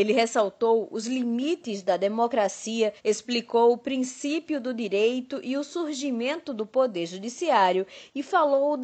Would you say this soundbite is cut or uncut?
cut